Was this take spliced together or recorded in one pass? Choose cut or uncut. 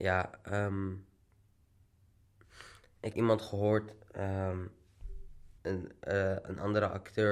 cut